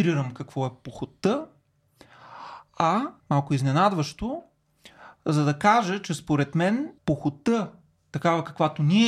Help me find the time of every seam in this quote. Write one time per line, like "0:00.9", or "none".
0:03.2
0:07.0